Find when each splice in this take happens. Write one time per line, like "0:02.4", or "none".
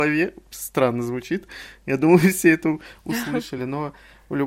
none

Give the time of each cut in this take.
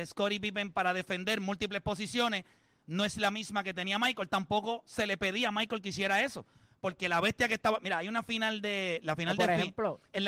none

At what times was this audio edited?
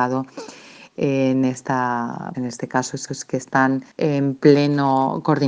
0:02.3
0:03.1
0:03.9

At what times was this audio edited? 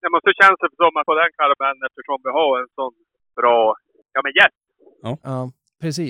0:01.1
0:03.3

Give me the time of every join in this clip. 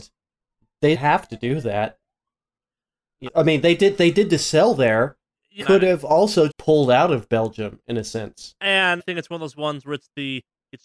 0:00.9
0:03.3
0:05.6
0:06.5
0:09.0

